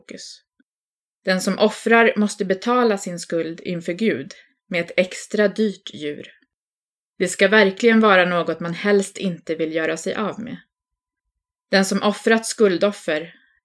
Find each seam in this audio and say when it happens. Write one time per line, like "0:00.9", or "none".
none